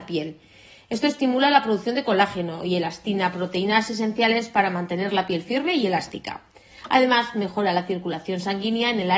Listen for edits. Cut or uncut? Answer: uncut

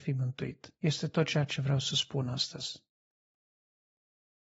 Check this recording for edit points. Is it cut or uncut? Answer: uncut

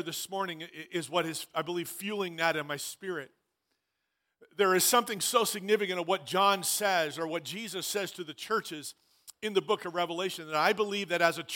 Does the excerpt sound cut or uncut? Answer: uncut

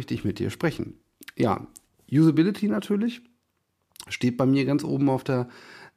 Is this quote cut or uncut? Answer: uncut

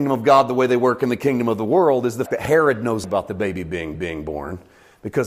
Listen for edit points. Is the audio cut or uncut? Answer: cut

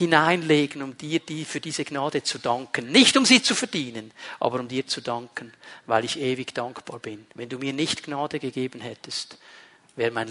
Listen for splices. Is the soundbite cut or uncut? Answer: cut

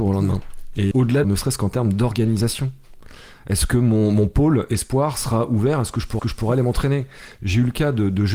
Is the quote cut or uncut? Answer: cut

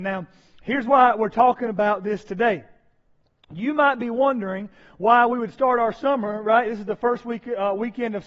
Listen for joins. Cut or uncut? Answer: uncut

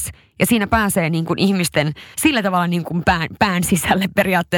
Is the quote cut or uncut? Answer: cut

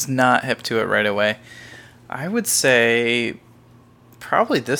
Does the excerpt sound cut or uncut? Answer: uncut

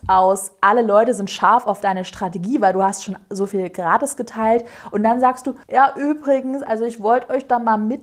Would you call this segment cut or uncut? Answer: cut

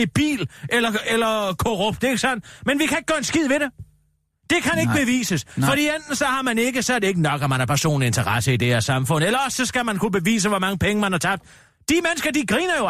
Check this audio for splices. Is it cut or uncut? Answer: uncut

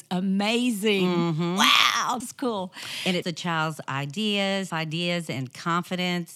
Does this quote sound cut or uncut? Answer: cut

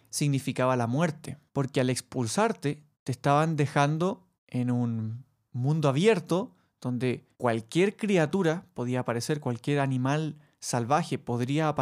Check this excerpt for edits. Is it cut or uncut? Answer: cut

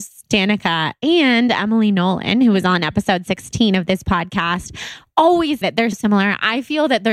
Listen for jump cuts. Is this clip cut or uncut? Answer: cut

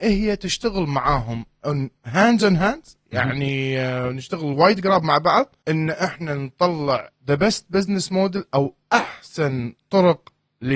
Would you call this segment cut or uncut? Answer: uncut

